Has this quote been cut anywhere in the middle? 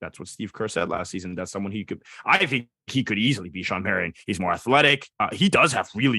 yes; 1 cut; at 5.1 s

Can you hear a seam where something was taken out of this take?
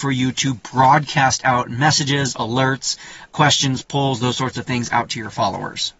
no; 0 cuts

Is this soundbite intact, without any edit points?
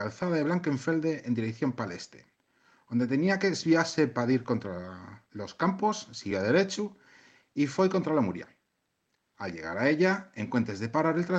yes; 0 cuts

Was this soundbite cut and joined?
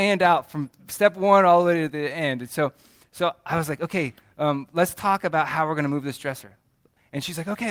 no; 0 cuts

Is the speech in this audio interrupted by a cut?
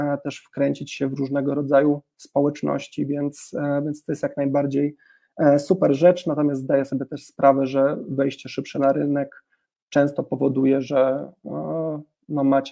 no; 0 cuts

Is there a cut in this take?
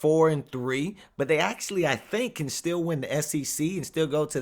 no; 0 cuts

